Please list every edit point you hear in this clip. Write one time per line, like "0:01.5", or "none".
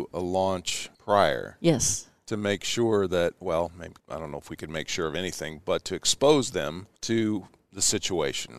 0:00.9
0:04.0
0:07.0